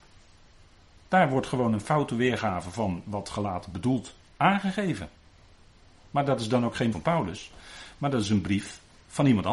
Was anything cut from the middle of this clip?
yes; 2 cuts; at 4.3 s, 6.9 s

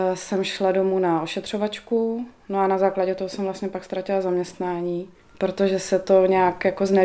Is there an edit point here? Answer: no; 0 cuts

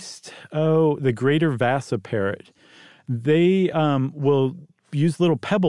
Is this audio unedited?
yes; 0 cuts

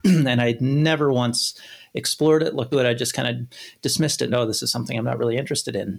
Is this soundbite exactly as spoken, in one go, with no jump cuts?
no; 2 cuts; at 2.7 s, 4.3 s

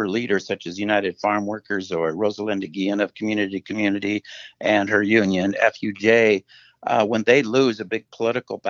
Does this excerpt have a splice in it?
no; 0 cuts

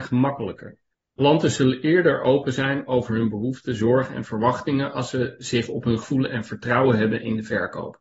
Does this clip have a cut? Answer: yes; 2 cuts; at 0.9 s, 6.0 s

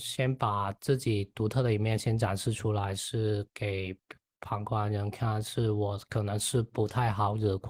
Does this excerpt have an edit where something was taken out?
no; 0 cuts

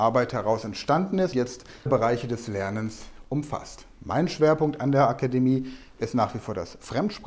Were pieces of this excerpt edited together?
yes; 2 cuts; at 1.3 s, 1.9 s

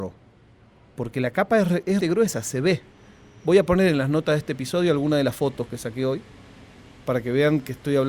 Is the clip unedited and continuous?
no; 1 cut; at 2.0 s

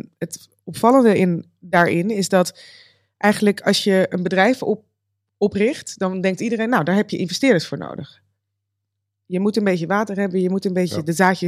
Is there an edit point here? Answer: no; 0 cuts

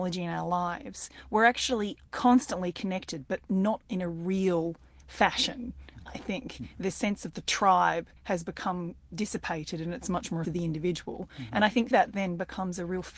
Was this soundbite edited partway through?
yes; 4 cuts; at 2.0 s, 8.2 s, 10.4 s, 11.9 s

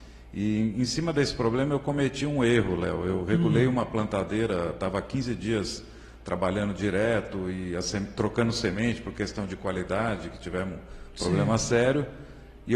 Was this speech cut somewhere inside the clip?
no; 0 cuts

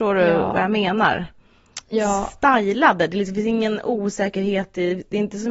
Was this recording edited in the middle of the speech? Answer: no; 0 cuts

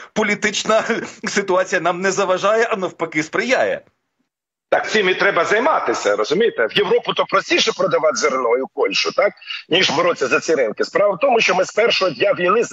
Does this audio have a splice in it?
yes; 1 cut; at 4.8 s

